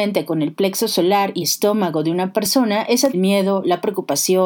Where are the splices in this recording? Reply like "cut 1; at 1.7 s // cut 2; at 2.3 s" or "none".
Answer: cut 1; at 1.4 s // cut 2; at 3.1 s